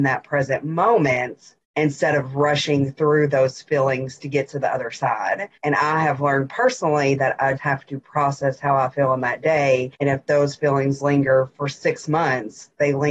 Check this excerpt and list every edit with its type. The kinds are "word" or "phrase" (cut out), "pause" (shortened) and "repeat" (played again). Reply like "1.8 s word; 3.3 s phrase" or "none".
1.6 s pause; 5.6 s pause; 7.6 s word; 9.9 s pause